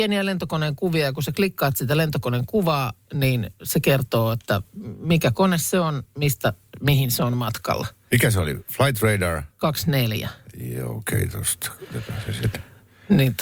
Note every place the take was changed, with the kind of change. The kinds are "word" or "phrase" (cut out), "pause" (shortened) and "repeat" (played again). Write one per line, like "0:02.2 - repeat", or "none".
none

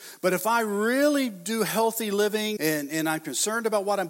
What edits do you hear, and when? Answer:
0:02.6 - word

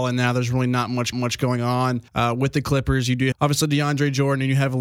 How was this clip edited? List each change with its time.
0:01.1 - repeat
0:02.1 - pause
0:03.3 - word

